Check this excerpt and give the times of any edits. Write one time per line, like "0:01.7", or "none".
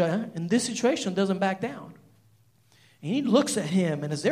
none